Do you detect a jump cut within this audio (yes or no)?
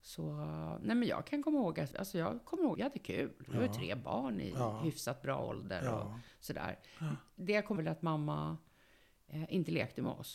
yes